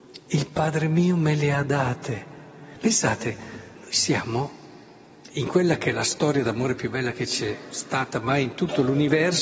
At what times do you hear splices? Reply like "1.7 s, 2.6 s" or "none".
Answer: 3.7 s